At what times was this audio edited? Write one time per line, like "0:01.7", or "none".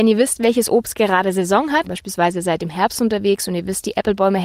0:01.9